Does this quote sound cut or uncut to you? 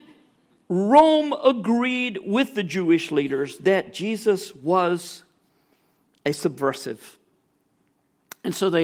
uncut